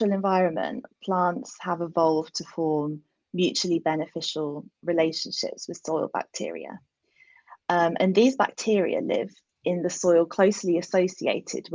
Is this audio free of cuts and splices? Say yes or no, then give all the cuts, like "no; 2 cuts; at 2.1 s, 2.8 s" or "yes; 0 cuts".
yes; 0 cuts